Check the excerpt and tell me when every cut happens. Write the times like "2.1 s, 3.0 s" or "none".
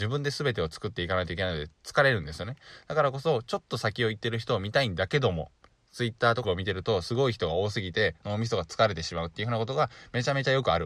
6.4 s